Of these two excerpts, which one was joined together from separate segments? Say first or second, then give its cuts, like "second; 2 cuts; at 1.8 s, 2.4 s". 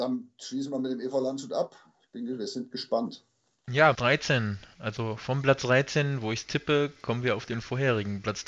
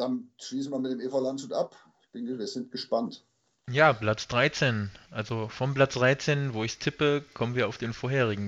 first; 1 cut; at 3.9 s